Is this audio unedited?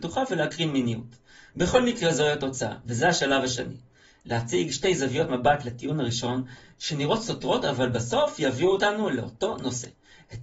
yes; 0 cuts

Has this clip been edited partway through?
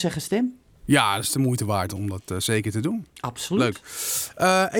yes; 1 cut; at 3.1 s

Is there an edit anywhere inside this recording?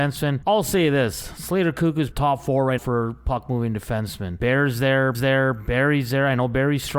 yes; 3 cuts; at 2.1 s, 2.8 s, 5.1 s

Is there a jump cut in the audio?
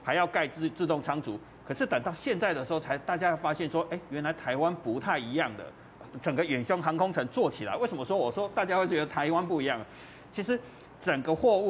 no; 0 cuts

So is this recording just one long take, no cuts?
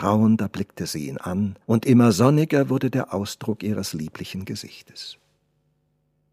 no; 1 cut; at 1.6 s

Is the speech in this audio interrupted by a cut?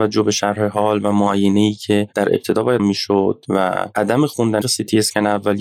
yes; 2 cuts; at 2.8 s, 4.6 s

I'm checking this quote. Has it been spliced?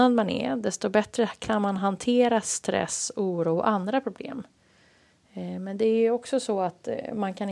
no; 0 cuts

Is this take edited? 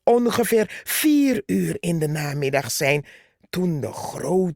no; 0 cuts

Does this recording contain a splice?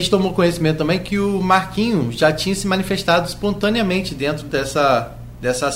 no; 0 cuts

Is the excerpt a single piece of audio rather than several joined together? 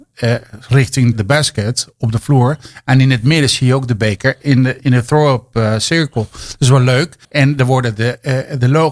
no; 3 cuts; at 1.1 s, 4.8 s, 7.2 s

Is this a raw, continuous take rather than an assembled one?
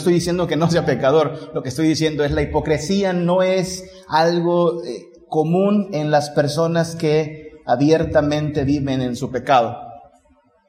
yes; 0 cuts

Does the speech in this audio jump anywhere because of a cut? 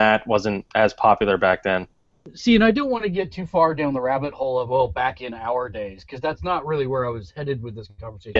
no; 0 cuts

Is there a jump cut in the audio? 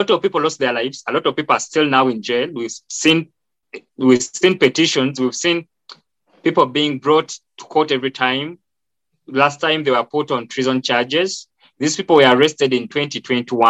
no; 0 cuts

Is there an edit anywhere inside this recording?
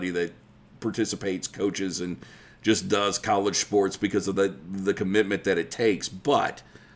no; 0 cuts

